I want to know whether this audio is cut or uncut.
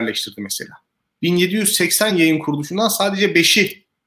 uncut